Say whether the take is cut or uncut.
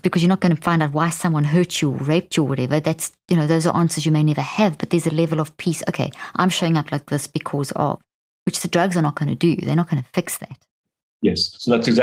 uncut